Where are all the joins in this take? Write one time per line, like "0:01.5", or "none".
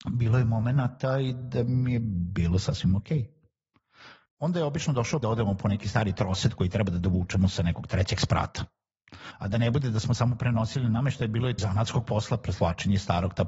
0:04.3
0:05.2
0:11.6